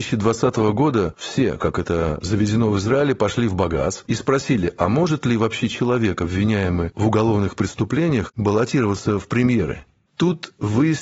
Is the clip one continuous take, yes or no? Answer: yes